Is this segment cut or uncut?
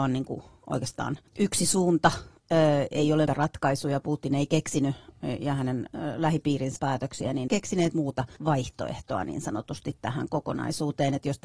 cut